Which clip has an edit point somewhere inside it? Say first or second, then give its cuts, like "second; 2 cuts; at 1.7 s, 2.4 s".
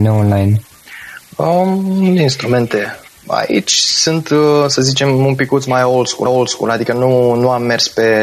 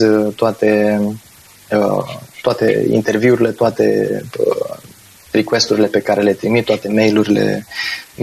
first; 2 cuts; at 3.1 s, 6.3 s